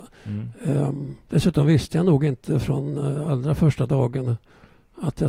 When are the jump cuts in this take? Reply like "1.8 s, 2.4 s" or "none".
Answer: 1.2 s